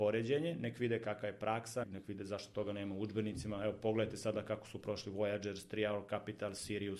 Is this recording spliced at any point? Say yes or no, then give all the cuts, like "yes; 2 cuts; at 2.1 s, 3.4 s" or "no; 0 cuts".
yes; 1 cut; at 1.8 s